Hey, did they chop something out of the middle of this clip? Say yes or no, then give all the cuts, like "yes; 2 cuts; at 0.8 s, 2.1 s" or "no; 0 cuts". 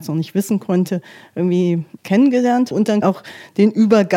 yes; 3 cuts; at 2.0 s, 2.7 s, 3.0 s